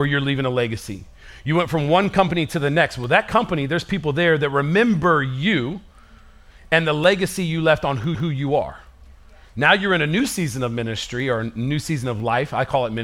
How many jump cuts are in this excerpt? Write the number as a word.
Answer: one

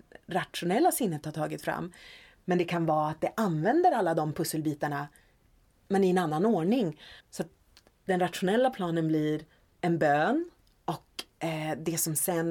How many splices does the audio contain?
one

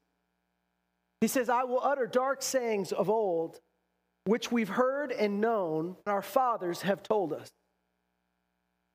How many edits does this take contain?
one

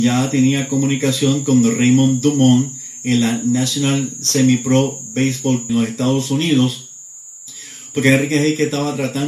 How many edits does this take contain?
one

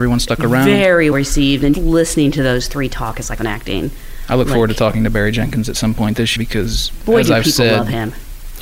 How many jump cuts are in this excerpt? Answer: four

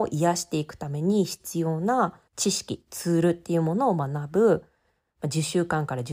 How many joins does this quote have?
one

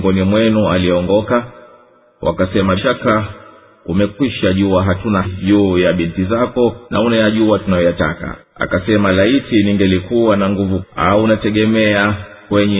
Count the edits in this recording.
five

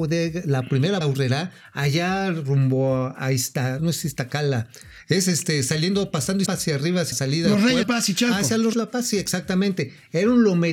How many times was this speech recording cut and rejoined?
six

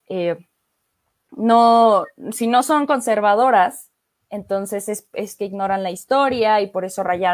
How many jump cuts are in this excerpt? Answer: zero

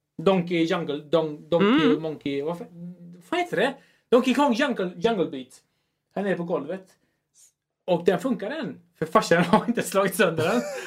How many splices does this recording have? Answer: zero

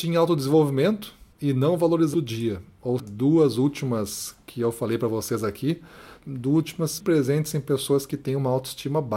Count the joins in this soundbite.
five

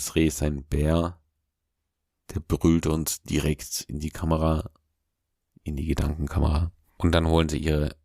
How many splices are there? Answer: zero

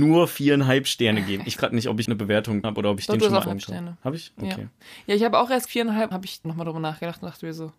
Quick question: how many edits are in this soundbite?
seven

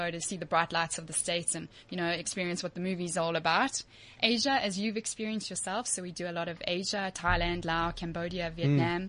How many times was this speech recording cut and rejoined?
zero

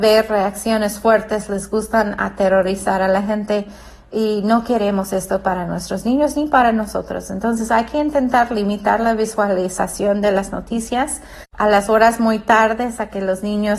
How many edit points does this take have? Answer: zero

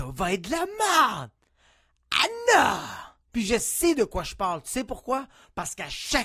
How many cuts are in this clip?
one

